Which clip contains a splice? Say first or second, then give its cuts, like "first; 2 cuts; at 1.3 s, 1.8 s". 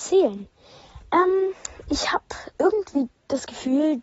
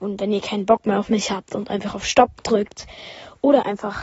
first; 1 cut; at 2.5 s